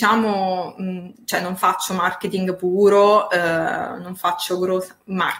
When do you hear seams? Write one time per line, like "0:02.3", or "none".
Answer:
none